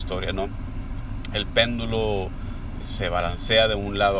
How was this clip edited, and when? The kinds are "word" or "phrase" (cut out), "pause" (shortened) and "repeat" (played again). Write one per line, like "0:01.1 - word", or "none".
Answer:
0:02.8 - word